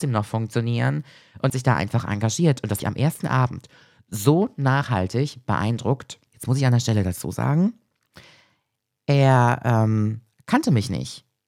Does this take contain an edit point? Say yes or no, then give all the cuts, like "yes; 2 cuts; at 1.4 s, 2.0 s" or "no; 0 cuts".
yes; 3 cuts; at 1.5 s, 2.8 s, 6.3 s